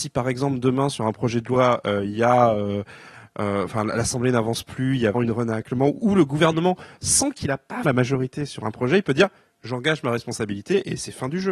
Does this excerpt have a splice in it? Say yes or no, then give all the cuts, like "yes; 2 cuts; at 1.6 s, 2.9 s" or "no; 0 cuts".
yes; 2 cuts; at 5.1 s, 7.8 s